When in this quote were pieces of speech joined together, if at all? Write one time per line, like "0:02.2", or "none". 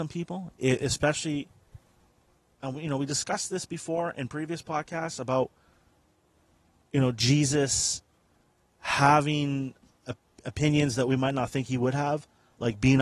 none